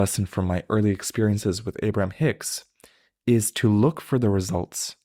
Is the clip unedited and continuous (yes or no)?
yes